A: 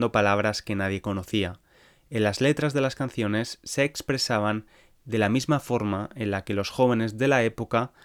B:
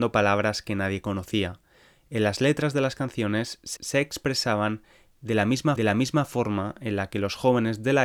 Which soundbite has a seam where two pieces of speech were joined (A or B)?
B